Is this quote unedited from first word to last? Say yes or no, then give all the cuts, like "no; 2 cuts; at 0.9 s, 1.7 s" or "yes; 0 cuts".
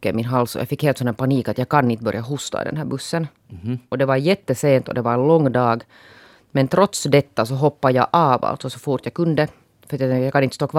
yes; 0 cuts